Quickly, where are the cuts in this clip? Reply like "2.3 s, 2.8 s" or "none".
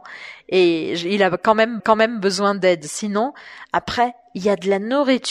1.8 s